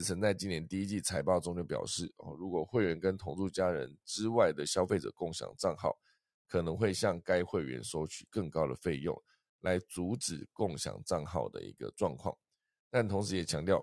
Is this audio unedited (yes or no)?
yes